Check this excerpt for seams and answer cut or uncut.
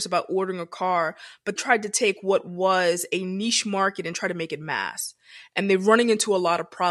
cut